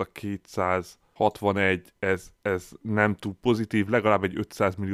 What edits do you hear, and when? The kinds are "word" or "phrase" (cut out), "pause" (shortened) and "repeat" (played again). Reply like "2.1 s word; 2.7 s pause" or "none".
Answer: none